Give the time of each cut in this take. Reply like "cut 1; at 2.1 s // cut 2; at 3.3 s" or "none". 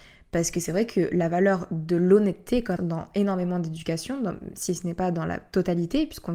cut 1; at 2.8 s